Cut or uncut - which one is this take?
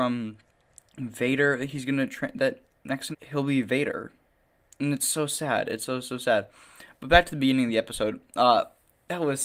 cut